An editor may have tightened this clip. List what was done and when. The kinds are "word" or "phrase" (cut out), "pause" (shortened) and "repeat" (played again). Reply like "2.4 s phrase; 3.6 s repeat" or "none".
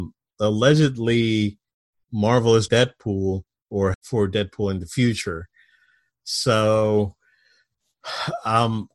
2.7 s word; 3.9 s phrase